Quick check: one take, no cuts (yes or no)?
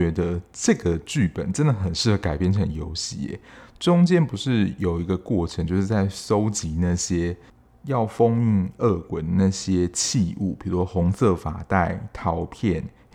yes